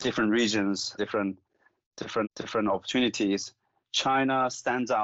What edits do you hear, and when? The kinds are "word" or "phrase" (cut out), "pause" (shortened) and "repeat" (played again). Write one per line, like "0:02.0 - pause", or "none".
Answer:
0:01.0 - word
0:02.2 - repeat